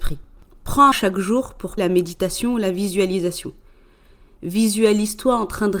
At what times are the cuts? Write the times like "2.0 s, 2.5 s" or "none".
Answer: 0.9 s, 1.8 s